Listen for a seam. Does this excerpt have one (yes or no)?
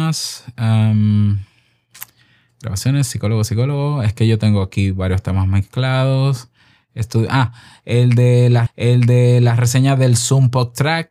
yes